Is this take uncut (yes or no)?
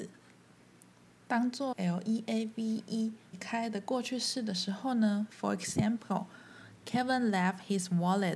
no